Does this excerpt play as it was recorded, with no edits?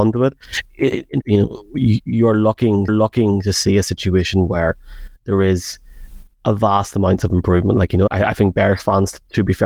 no; 3 cuts; at 1.2 s, 2.9 s, 8.1 s

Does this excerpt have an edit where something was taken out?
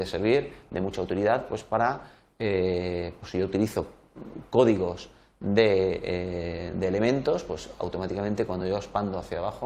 no; 0 cuts

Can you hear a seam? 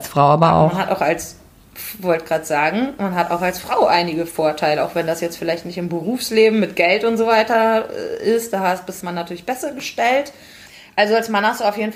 yes; 2 cuts; at 9.0 s, 10.7 s

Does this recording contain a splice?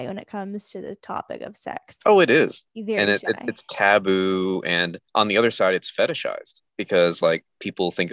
yes; 4 cuts; at 2.0 s, 2.7 s, 5.1 s, 6.7 s

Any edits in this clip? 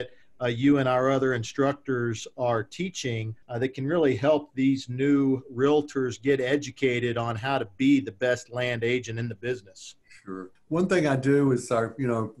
yes; 2 cuts; at 3.4 s, 10.6 s

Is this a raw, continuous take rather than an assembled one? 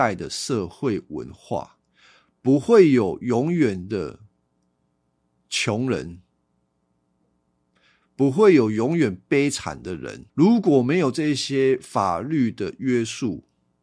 no; 1 cut; at 10.3 s

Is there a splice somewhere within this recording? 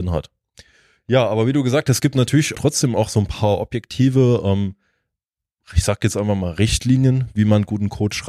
yes; 1 cut; at 2.5 s

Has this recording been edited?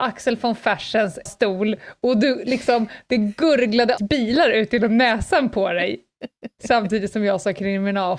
yes; 2 cuts; at 1.3 s, 4.0 s

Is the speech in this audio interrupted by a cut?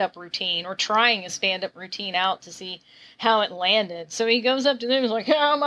no; 0 cuts

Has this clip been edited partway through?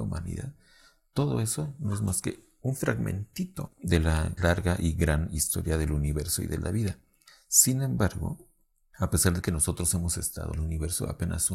yes; 1 cut; at 10.5 s

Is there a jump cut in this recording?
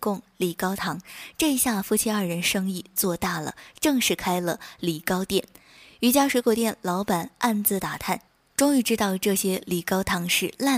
no; 0 cuts

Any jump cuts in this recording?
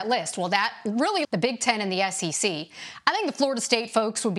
yes; 1 cut; at 1.2 s

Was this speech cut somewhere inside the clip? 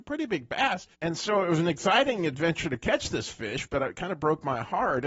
yes; 1 cut; at 0.9 s

